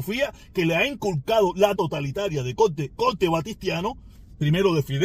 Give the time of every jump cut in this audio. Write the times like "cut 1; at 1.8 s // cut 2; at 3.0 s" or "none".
cut 1; at 1.7 s // cut 2; at 2.9 s